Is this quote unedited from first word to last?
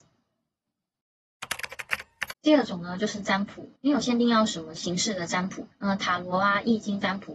no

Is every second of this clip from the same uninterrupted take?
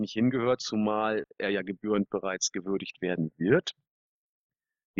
yes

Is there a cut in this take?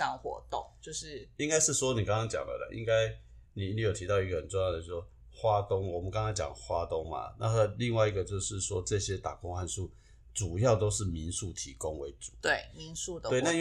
no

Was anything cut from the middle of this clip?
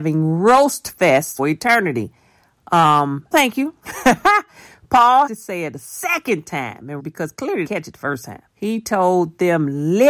yes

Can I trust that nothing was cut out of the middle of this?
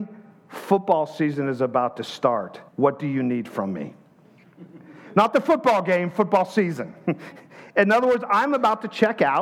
no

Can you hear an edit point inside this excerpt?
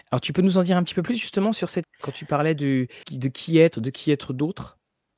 yes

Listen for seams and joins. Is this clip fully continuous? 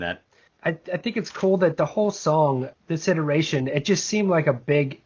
yes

